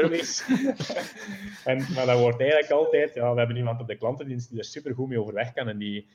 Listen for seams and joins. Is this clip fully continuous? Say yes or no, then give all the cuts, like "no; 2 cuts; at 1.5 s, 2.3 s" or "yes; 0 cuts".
yes; 0 cuts